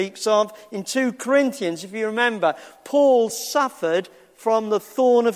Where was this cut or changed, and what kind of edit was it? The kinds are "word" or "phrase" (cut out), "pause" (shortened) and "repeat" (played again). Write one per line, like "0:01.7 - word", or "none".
none